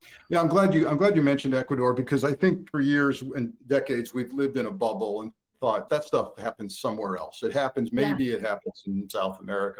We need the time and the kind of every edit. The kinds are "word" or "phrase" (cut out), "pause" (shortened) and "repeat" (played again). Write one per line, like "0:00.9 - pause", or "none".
0:02.7 - phrase
0:03.6 - pause
0:05.9 - word